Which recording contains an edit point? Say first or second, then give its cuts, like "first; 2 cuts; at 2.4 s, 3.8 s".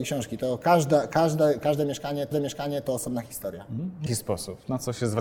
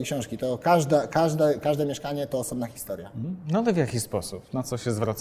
first; 2 cuts; at 2.3 s, 4.1 s